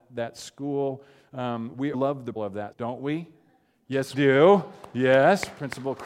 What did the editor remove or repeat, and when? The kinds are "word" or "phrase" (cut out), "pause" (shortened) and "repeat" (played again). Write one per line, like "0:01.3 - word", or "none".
0:01.9 - word
0:02.4 - word
0:02.7 - word
0:04.1 - word

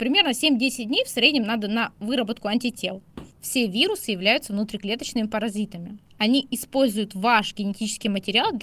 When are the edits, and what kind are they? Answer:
0:03.3 - pause
0:06.1 - pause

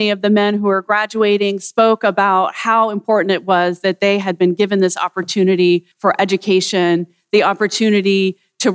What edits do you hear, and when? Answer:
0:05.9 - pause

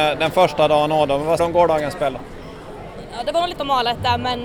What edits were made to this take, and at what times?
0:01.4 - word
0:03.5 - word

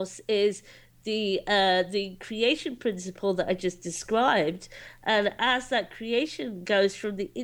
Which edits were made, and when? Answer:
none

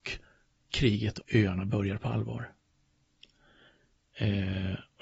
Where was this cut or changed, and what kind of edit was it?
0:01.2 - word

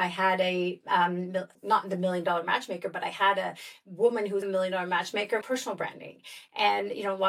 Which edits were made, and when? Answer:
0:01.5 - pause
0:04.4 - word
0:05.4 - phrase

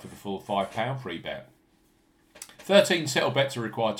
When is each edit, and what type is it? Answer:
0:02.5 - pause

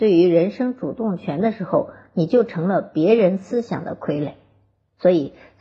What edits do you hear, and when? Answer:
none

